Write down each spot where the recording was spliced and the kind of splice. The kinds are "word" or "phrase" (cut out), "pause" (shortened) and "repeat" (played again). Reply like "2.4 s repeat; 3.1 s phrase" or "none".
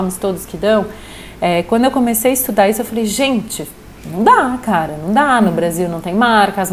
none